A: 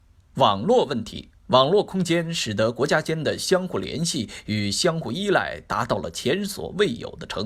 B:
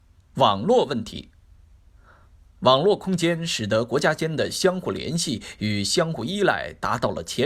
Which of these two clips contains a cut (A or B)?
A